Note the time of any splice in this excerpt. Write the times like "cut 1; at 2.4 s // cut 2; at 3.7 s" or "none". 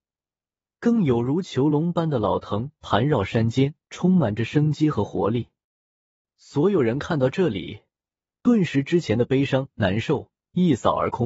cut 1; at 3.8 s